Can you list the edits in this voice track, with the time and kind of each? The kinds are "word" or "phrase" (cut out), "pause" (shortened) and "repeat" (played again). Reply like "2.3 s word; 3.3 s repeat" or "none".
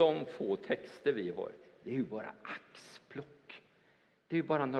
none